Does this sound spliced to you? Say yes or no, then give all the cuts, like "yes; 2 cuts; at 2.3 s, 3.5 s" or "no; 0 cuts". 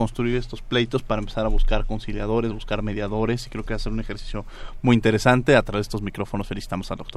no; 0 cuts